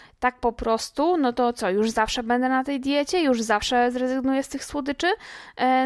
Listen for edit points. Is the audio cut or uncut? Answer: uncut